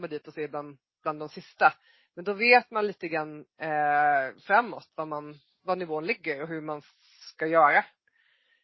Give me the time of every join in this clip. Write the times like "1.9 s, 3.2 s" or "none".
none